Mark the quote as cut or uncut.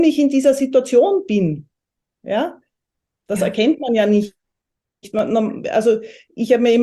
uncut